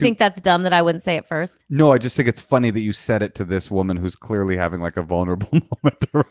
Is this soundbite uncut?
yes; 0 cuts

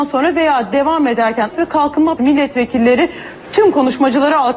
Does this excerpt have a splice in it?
yes; 2 cuts; at 1.5 s, 2.2 s

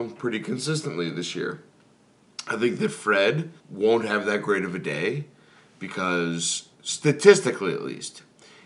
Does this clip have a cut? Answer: yes; 2 cuts; at 3.6 s, 6.7 s

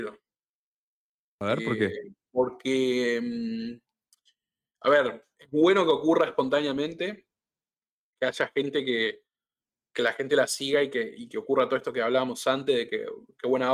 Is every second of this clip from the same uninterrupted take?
yes; 0 cuts

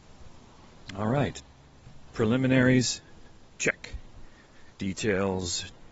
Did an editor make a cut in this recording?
yes; 2 cuts; at 2.1 s, 4.7 s

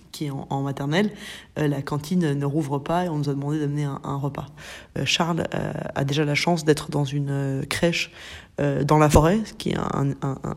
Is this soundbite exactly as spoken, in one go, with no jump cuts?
yes; 0 cuts

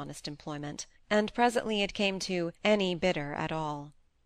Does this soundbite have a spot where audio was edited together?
yes; 3 cuts; at 0.9 s, 2.2 s, 2.5 s

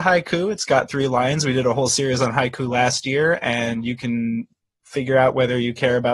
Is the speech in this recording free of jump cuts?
yes; 0 cuts

